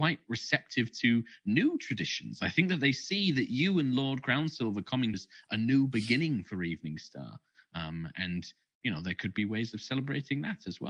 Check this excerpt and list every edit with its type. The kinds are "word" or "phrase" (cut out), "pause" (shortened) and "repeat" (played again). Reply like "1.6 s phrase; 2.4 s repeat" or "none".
5.1 s word

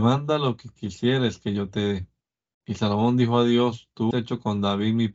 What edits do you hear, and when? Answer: 4.1 s word

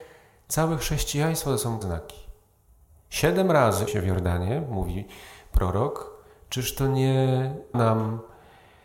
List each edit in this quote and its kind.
1.8 s word; 3.9 s word; 7.7 s word

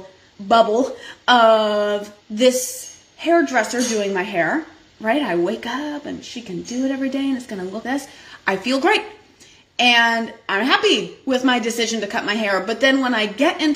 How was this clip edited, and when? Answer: 2.2 s pause; 7.8 s word

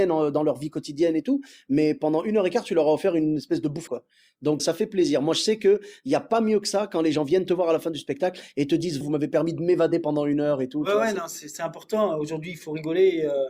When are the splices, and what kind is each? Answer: 3.9 s word; 4.6 s word; 9.0 s word

